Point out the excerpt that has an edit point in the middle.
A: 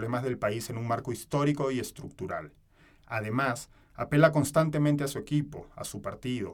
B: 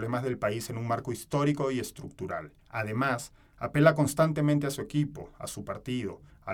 B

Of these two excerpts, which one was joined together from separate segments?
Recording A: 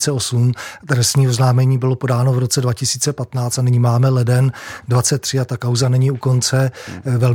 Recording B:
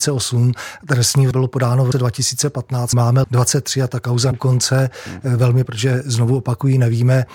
B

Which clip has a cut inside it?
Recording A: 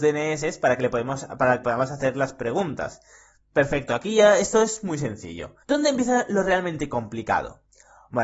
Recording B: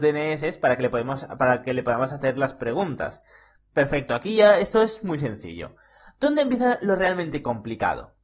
A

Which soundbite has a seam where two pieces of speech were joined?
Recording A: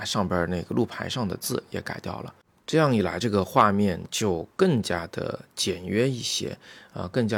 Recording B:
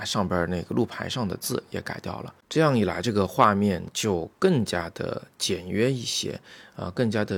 B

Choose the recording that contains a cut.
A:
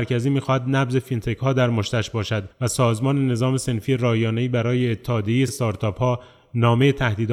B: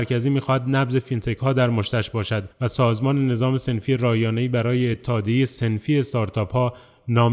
A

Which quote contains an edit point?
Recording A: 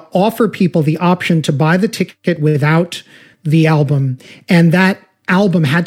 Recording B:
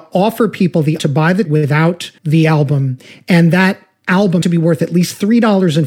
B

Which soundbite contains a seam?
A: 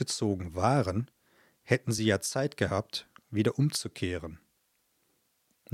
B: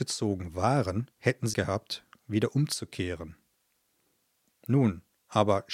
B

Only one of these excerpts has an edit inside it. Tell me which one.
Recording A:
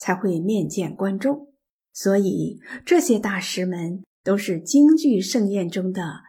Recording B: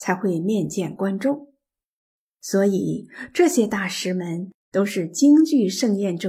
A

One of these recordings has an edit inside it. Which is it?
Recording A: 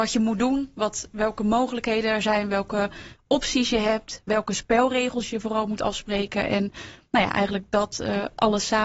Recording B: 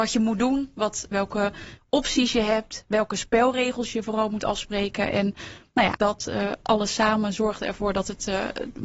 B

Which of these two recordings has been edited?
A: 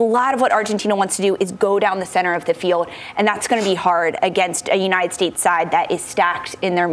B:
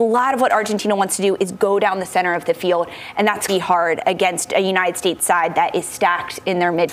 B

